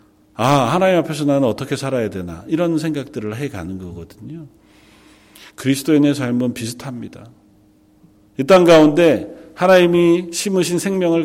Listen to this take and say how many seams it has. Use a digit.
0